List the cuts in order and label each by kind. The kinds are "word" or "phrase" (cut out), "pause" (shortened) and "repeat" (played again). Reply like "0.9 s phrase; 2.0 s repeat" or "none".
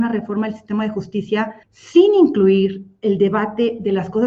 1.6 s pause

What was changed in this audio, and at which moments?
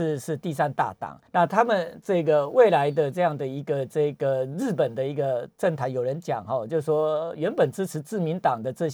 1.3 s pause

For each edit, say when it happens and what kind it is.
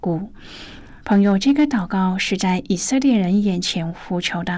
1.0 s pause

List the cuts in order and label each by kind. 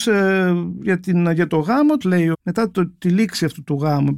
2.0 s phrase; 2.3 s word

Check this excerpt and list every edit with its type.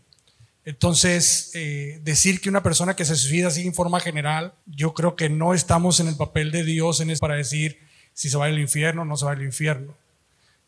4.6 s pause; 7.2 s word

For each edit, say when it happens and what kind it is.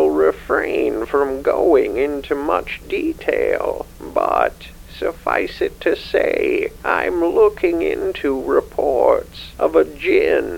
none

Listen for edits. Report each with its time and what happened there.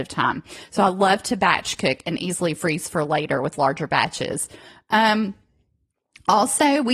none

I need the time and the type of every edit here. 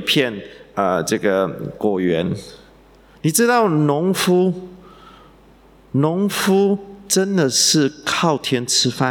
none

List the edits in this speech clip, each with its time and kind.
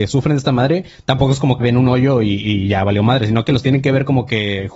1.6 s word

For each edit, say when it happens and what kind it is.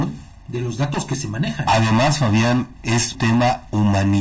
3.1 s word

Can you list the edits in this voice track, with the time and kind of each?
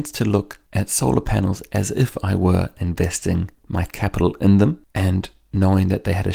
none

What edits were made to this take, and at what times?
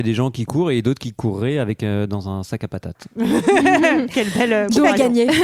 none

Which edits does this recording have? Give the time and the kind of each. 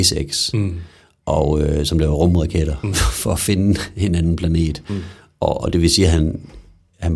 none

